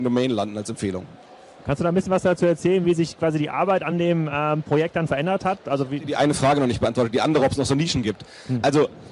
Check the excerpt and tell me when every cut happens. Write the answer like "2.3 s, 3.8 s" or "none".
none